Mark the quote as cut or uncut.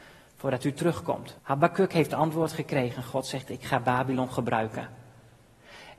cut